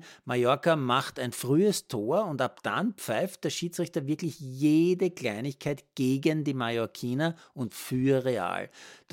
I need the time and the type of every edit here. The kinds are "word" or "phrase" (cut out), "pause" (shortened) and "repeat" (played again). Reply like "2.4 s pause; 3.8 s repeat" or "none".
none